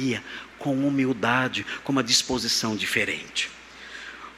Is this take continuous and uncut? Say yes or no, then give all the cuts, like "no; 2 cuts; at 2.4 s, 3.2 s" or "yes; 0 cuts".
yes; 0 cuts